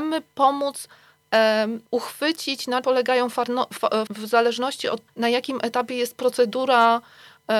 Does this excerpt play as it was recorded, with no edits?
no; 4 cuts; at 1.9 s, 2.8 s, 4.1 s, 5.1 s

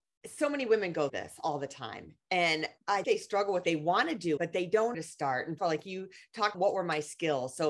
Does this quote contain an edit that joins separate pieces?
yes; 7 cuts; at 1.1 s, 3.0 s, 3.6 s, 4.4 s, 4.9 s, 5.6 s, 6.5 s

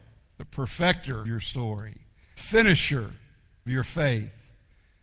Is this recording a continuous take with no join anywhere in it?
no; 3 cuts; at 1.2 s, 2.4 s, 3.7 s

